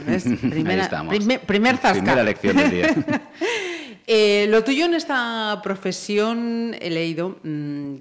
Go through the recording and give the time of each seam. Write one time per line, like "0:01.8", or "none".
none